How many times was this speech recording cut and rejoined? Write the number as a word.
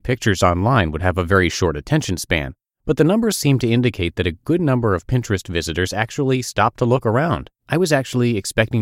two